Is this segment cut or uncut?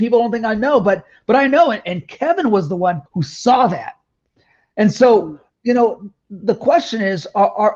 cut